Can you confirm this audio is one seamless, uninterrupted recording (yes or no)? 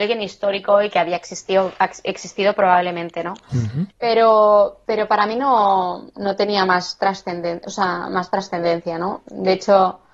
no